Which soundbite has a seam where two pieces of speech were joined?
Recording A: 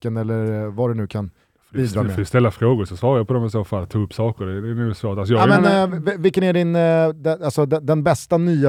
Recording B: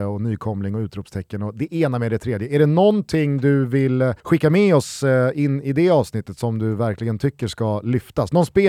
B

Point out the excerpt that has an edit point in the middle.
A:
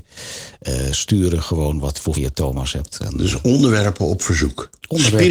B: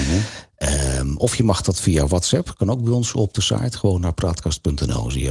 A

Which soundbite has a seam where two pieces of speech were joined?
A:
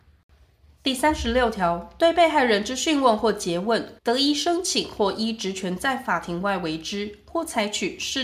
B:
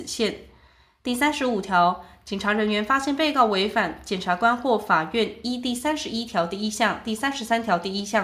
A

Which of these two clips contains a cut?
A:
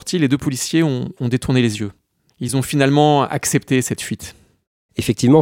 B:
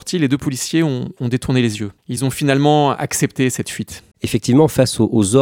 B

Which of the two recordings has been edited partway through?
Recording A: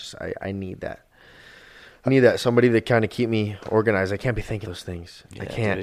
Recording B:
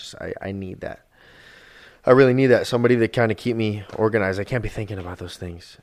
A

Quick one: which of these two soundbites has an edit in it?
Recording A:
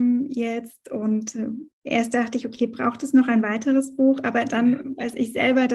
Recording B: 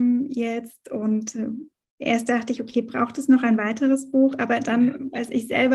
A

